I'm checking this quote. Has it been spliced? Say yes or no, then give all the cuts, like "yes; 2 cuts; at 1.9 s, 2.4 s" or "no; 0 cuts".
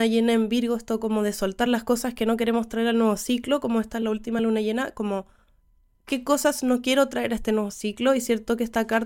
no; 0 cuts